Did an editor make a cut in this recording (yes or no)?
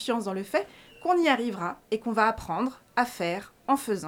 no